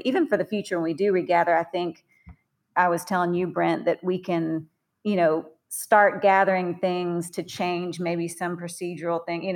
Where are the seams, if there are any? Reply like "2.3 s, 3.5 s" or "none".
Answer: none